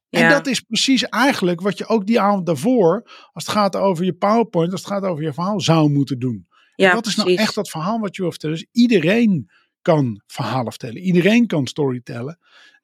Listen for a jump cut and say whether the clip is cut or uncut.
uncut